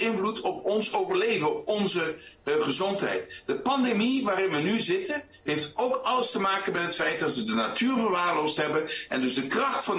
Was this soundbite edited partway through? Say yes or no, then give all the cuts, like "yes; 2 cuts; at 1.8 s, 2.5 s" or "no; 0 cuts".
no; 0 cuts